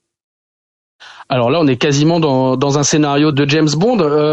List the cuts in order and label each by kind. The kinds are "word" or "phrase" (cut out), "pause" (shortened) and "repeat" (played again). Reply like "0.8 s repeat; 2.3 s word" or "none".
3.3 s word